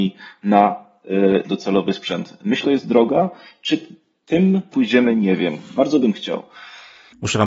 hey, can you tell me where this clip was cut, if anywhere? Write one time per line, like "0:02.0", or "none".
0:01.4
0:02.6
0:04.7